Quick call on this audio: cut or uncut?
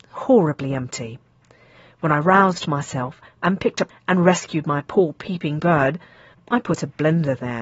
cut